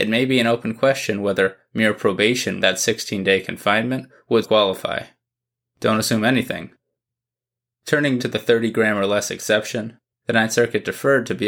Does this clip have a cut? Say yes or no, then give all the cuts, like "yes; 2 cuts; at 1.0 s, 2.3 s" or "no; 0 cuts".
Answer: yes; 3 cuts; at 2.6 s, 4.4 s, 8.2 s